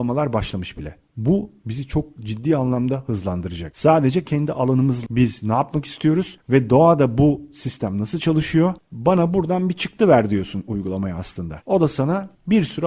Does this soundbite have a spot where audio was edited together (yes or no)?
yes